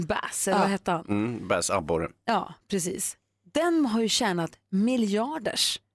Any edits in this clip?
no; 0 cuts

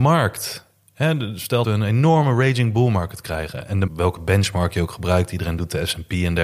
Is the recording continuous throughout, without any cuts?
no; 2 cuts; at 1.6 s, 3.9 s

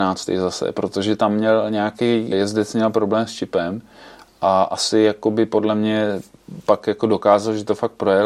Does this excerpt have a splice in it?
yes; 1 cut; at 2.3 s

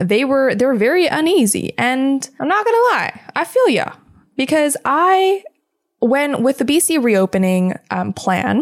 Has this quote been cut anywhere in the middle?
no; 0 cuts

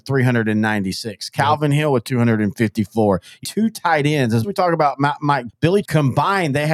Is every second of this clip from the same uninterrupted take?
no; 4 cuts; at 3.4 s, 4.4 s, 5.5 s, 5.8 s

